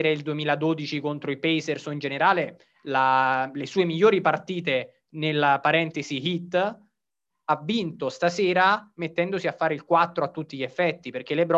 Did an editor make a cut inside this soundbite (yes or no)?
no